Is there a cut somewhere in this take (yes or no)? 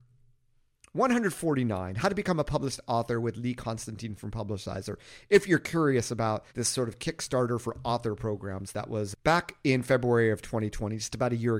yes